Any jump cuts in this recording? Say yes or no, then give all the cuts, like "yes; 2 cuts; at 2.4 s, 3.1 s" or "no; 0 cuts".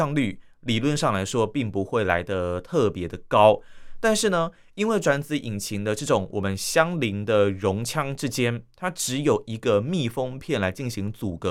no; 0 cuts